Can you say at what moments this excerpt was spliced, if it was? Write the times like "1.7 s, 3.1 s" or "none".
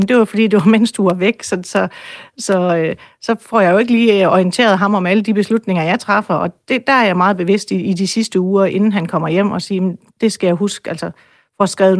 none